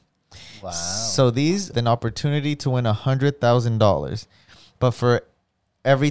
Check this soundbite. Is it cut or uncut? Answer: cut